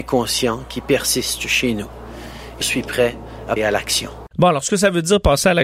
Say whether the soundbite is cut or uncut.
cut